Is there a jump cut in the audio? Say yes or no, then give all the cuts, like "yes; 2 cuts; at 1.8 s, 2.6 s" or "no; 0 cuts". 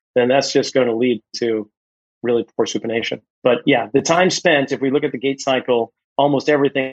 yes; 1 cut; at 3.3 s